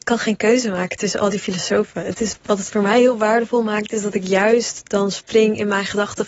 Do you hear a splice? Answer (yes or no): yes